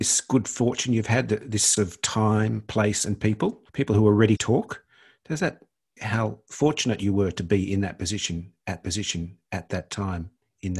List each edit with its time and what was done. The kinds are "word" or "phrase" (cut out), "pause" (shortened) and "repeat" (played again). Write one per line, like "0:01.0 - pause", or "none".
0:01.8 - word
0:03.7 - pause
0:04.4 - word
0:06.0 - phrase
0:08.8 - repeat